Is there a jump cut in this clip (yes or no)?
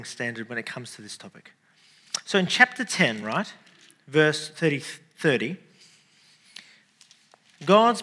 no